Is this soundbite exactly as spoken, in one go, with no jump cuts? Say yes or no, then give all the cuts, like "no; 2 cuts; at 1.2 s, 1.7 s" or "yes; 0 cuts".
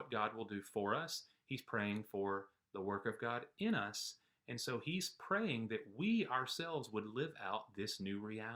yes; 0 cuts